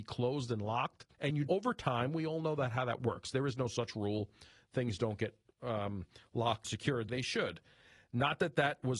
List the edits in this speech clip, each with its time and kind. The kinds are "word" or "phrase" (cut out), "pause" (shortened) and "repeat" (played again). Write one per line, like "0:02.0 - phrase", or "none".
0:01.1 - pause
0:01.5 - phrase
0:06.6 - word
0:07.1 - word